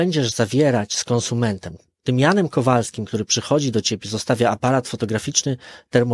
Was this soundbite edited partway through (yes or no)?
no